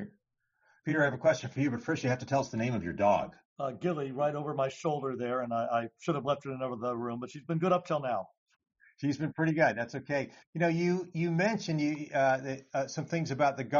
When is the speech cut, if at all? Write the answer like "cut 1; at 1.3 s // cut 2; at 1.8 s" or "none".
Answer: none